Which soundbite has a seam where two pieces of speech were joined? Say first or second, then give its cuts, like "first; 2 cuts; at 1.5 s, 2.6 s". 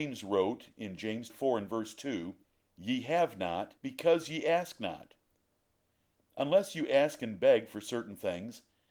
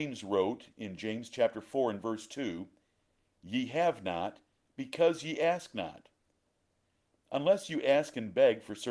first; 3 cuts; at 1.3 s, 2.4 s, 3.8 s